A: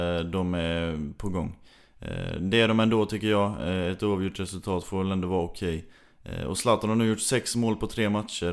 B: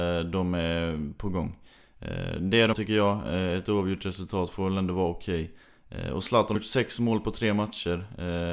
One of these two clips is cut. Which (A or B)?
B